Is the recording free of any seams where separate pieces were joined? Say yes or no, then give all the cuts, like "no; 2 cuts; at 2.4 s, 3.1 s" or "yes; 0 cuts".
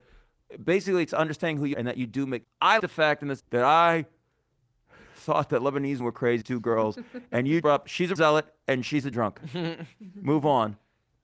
no; 9 cuts; at 1.7 s, 2.4 s, 2.8 s, 3.4 s, 6.0 s, 6.4 s, 7.6 s, 8.2 s, 9.1 s